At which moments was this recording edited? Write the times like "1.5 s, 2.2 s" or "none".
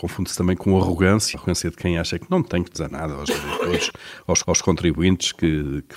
1.3 s, 2.7 s, 4.4 s